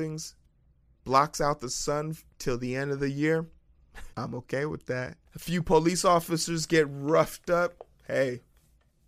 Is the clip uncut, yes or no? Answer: no